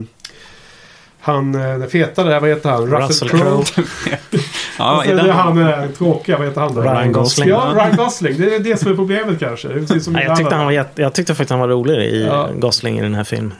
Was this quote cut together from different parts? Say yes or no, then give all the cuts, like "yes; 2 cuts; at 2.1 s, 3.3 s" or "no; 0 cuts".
no; 0 cuts